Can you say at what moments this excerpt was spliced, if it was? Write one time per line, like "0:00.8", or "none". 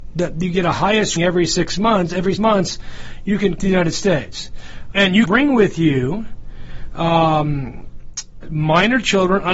0:01.2
0:02.4
0:03.6
0:04.9
0:05.3
0:08.4